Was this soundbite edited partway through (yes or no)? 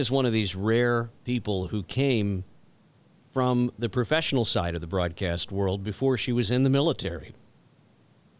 yes